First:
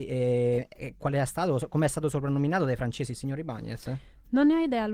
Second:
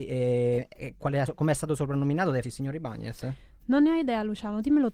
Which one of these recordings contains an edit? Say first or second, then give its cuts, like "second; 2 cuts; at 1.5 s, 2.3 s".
second; 2 cuts; at 1.3 s, 2.4 s